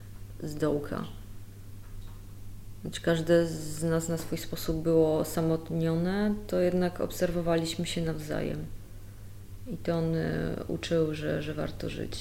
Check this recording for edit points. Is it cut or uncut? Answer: uncut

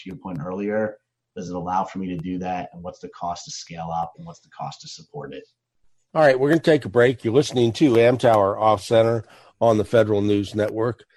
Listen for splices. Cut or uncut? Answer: uncut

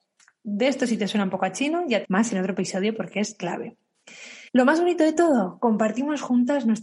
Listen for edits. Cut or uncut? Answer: cut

